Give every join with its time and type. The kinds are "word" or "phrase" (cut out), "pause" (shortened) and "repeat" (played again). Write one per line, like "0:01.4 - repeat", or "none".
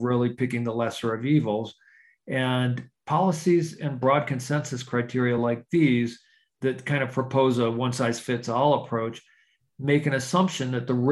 none

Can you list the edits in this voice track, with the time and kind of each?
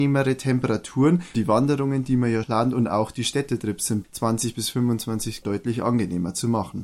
0:01.3 - word
0:02.4 - word
0:04.0 - word
0:05.4 - word

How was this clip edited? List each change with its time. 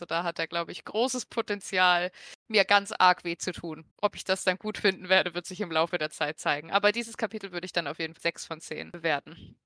0:02.4 - pause
0:03.9 - pause
0:08.2 - word

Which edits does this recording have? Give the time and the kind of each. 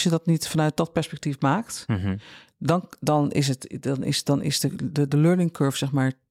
none

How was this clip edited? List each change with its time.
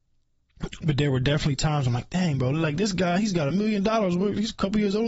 none

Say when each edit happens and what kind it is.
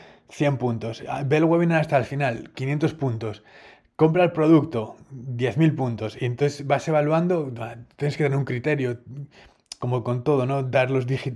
none

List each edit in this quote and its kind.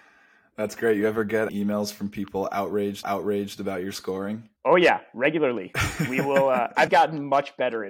0:01.5 - word
0:03.0 - repeat
0:04.6 - pause
0:06.9 - word

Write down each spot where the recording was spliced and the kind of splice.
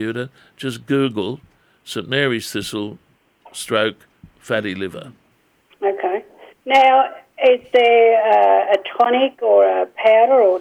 none

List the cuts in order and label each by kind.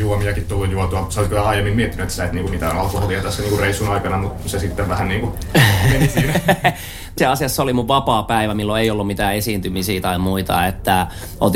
0:02.5 - word
0:07.2 - word

